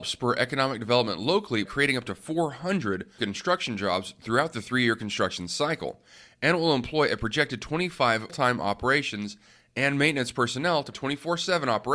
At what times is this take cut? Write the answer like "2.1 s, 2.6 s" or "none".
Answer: 1.7 s, 3.2 s, 8.3 s, 10.9 s